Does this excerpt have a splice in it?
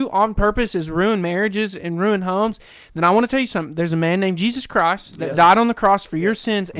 no; 0 cuts

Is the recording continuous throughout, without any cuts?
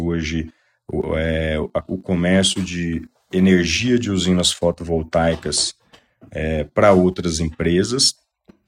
yes; 0 cuts

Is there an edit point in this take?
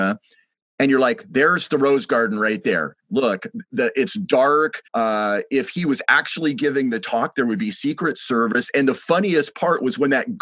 yes; 2 cuts; at 3.0 s, 4.9 s

